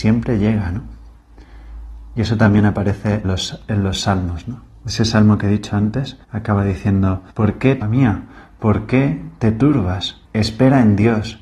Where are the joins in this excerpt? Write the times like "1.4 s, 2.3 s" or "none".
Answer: 3.2 s, 4.7 s, 6.2 s, 7.3 s, 7.8 s, 10.2 s

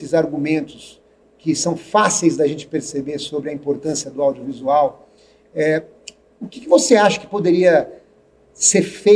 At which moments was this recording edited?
none

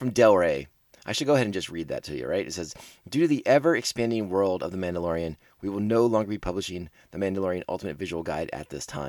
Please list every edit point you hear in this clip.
none

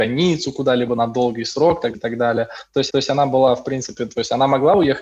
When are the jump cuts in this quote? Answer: 1.9 s, 2.9 s

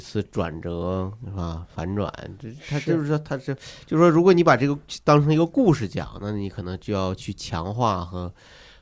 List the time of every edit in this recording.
none

